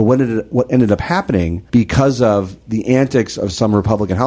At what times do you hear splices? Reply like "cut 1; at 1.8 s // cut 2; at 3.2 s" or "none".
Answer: cut 1; at 1.7 s